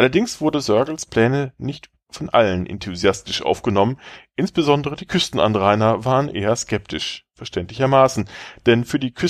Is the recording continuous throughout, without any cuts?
yes; 0 cuts

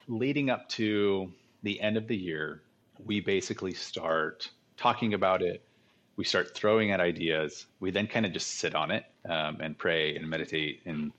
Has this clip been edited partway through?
yes; 1 cut; at 9.1 s

